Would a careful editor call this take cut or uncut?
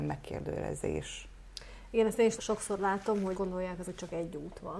cut